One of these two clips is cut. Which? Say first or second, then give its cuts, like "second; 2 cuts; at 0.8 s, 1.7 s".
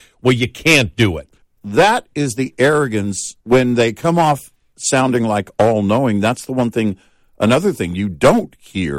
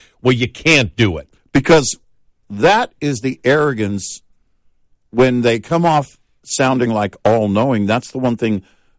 first; 2 cuts; at 1.4 s, 3.4 s